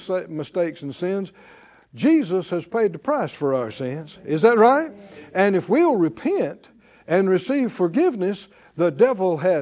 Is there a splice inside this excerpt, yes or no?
no